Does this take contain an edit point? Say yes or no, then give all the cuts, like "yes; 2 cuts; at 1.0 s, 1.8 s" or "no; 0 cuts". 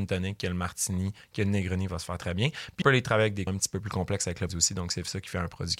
yes; 3 cuts; at 2.8 s, 3.5 s, 4.5 s